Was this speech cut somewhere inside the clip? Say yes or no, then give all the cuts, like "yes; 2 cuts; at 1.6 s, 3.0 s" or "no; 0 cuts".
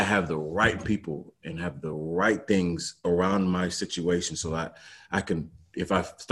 no; 0 cuts